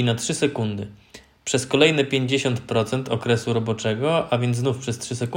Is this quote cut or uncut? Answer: uncut